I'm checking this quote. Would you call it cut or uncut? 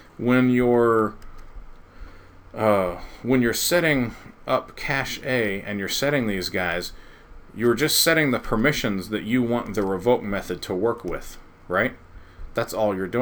uncut